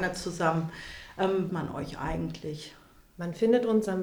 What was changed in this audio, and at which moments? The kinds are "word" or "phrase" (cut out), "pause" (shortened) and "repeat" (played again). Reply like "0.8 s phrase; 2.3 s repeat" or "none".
1.5 s phrase